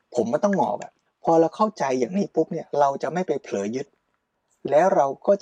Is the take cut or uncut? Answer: cut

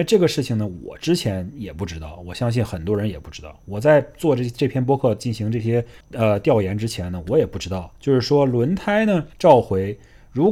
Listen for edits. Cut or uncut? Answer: cut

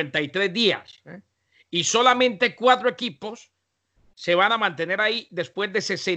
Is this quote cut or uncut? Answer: uncut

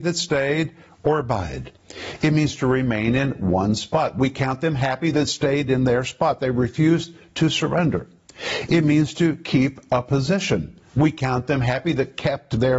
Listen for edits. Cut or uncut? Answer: uncut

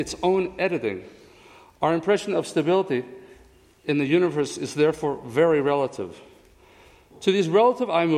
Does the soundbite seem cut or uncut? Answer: uncut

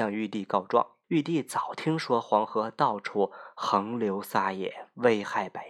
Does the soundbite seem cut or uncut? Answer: cut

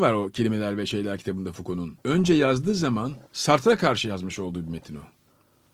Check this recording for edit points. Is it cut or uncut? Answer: cut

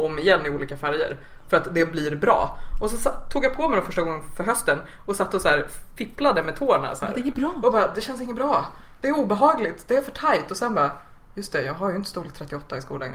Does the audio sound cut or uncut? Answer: uncut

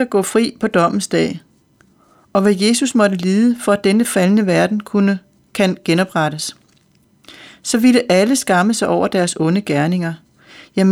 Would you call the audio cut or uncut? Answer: uncut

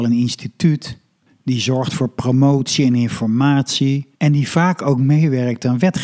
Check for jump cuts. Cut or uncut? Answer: cut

